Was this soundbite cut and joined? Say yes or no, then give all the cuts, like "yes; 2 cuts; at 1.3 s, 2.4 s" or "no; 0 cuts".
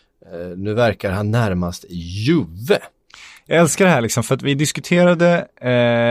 no; 0 cuts